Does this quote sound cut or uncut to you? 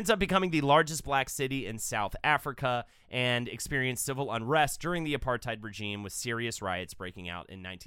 uncut